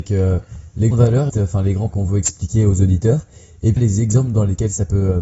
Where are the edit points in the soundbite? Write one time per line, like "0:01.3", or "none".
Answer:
0:00.9
0:01.3
0:01.9
0:03.8

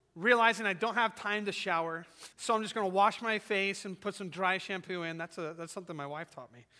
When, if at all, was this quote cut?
0:02.3

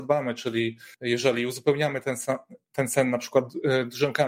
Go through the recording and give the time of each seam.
0:00.9

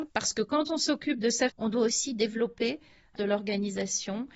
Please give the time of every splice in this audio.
0:01.5
0:03.2

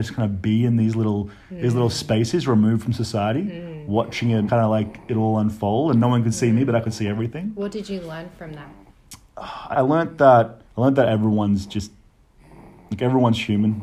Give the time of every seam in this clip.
0:04.5
0:09.7
0:10.6

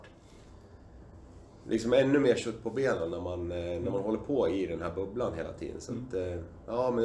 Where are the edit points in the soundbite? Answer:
none

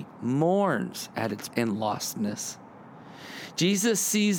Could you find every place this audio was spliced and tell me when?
0:01.5

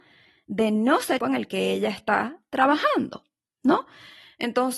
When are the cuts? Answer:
0:01.2

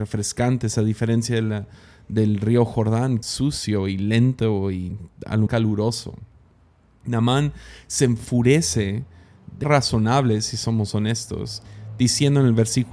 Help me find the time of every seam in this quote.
0:03.2
0:05.5
0:09.6

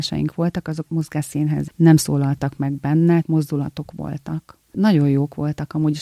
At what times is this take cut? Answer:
0:01.7
0:03.2

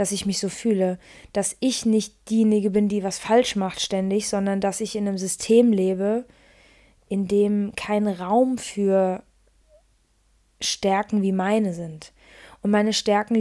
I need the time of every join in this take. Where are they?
none

